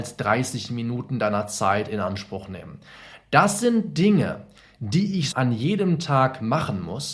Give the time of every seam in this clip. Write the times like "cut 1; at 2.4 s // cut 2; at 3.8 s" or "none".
cut 1; at 5.3 s